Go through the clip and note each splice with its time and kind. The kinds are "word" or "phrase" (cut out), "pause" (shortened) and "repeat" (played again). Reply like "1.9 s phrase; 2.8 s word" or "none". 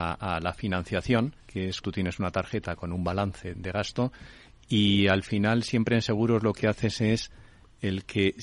1.4 s pause; 1.8 s word; 3.5 s word